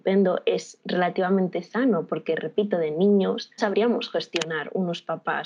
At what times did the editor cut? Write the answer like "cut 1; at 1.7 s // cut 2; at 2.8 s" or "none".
cut 1; at 3.6 s